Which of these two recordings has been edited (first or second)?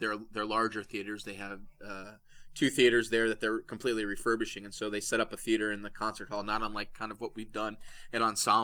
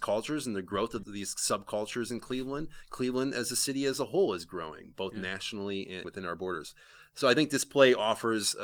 second